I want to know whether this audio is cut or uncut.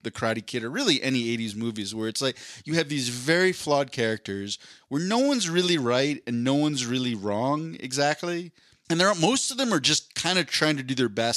uncut